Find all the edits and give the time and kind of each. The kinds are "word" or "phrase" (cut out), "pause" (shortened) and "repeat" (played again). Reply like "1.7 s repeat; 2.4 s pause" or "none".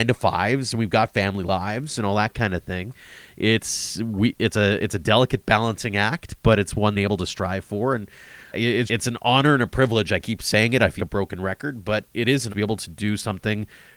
6.9 s phrase; 8.5 s word; 8.9 s word; 11.0 s word; 12.1 s pause; 12.5 s phrase